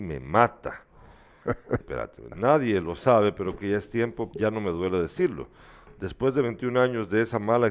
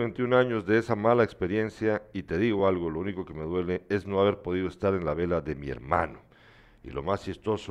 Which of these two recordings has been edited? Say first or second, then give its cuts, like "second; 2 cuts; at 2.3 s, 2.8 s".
first; 3 cuts; at 1.8 s, 3.6 s, 4.3 s